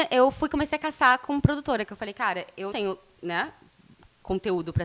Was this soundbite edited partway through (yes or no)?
yes